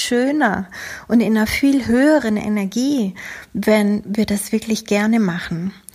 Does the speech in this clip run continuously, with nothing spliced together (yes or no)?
yes